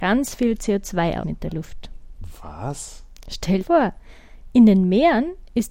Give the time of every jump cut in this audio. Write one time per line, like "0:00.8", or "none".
0:01.2
0:03.6